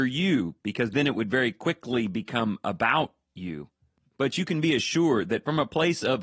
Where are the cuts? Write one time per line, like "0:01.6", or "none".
none